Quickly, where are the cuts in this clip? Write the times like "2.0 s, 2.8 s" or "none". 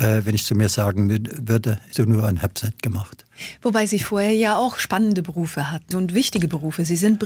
1.9 s, 5.9 s

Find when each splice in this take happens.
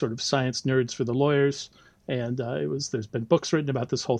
none

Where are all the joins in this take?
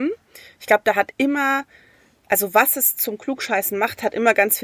none

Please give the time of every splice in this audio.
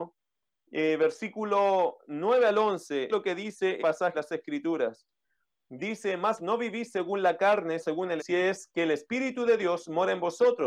3.1 s, 3.8 s, 4.1 s, 6.4 s, 7.8 s, 8.2 s

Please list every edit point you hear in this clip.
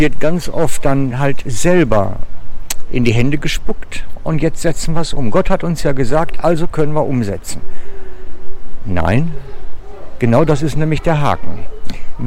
none

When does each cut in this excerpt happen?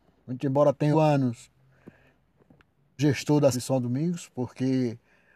0.9 s, 3.0 s, 3.5 s

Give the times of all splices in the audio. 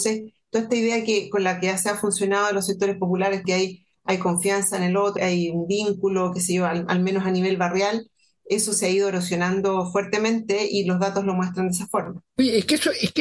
3.4 s, 5.2 s

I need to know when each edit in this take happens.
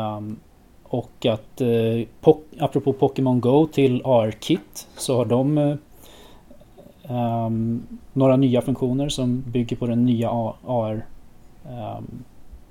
none

